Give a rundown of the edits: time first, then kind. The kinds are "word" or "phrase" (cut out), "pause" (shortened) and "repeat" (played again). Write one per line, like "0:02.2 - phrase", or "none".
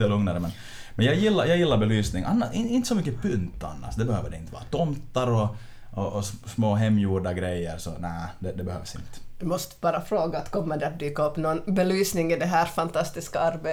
none